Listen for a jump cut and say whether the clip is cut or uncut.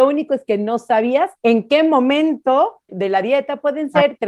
cut